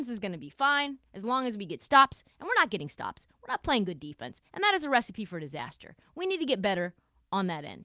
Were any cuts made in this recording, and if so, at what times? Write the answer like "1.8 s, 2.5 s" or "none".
none